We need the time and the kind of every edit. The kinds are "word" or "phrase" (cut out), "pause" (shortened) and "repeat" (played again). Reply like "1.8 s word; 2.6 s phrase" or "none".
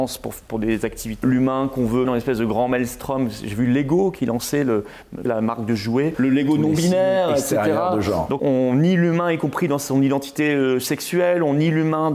1.2 s phrase; 2.1 s word; 5.3 s word; 6.1 s phrase; 8.4 s word